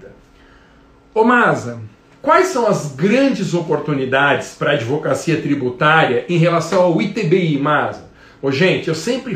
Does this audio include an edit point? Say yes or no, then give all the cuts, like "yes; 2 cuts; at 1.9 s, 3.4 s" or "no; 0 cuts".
no; 0 cuts